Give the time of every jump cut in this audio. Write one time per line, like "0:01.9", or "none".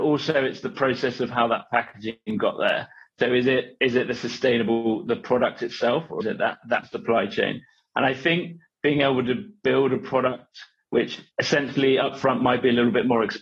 0:06.2

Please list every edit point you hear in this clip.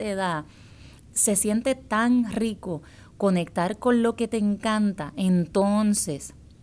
none

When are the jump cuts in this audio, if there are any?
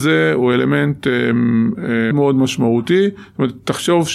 0:02.1

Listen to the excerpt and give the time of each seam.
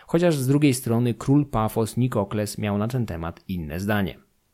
none

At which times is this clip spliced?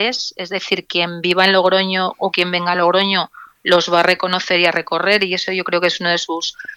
none

